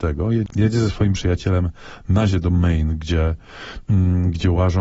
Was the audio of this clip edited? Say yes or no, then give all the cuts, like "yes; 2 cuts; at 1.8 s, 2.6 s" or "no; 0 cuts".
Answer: yes; 2 cuts; at 1.1 s, 2.3 s